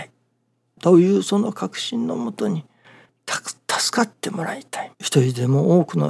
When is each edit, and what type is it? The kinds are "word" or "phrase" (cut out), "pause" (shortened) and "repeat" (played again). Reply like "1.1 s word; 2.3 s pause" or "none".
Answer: 3.1 s pause; 4.9 s pause